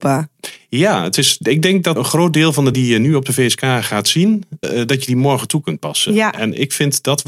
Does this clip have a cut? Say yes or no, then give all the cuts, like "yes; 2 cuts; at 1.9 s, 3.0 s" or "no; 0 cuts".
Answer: yes; 3 cuts; at 2.0 s, 2.7 s, 4.6 s